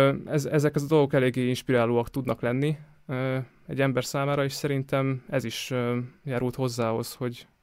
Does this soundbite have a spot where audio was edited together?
no; 0 cuts

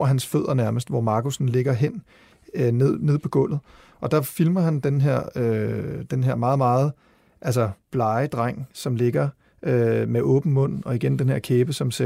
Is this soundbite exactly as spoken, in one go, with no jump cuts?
no; 1 cut; at 7.8 s

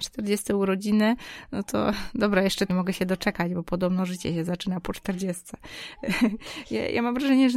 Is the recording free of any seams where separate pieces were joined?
no; 1 cut; at 2.7 s

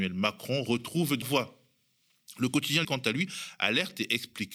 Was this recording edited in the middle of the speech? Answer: yes; 2 cuts; at 1.2 s, 2.8 s

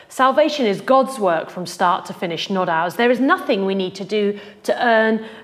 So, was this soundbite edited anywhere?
no; 0 cuts

